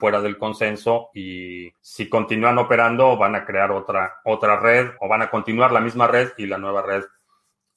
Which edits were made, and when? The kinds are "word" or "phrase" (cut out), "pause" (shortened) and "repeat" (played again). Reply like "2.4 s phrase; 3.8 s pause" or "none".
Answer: 1.8 s pause; 5.0 s word